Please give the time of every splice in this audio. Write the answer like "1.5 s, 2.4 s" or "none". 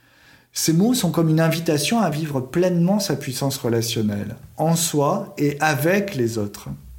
none